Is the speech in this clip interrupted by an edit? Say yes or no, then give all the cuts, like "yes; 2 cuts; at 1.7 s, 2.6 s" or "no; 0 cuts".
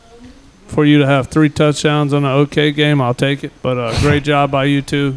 yes; 1 cut; at 3.6 s